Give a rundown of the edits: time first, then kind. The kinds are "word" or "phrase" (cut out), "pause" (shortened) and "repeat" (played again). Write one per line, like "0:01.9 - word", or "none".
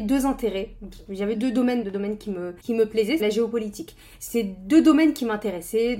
0:01.3 - word
0:01.8 - word
0:02.6 - pause
0:03.2 - phrase